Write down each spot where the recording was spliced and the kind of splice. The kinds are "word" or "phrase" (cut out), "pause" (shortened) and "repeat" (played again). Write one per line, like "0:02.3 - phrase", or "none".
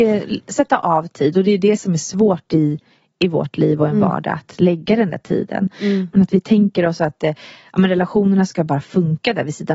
none